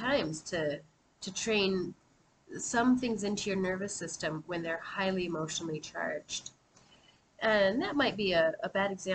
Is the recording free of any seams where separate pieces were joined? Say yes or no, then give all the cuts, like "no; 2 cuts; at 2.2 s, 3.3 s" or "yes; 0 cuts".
yes; 0 cuts